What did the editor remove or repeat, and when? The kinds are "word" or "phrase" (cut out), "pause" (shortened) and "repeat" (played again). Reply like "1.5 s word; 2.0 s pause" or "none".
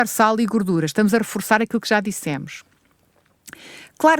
none